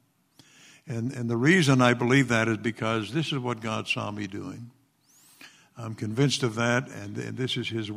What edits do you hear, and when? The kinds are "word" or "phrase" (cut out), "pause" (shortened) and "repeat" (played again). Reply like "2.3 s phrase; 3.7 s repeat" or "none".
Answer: none